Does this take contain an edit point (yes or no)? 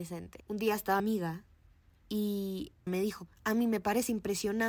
yes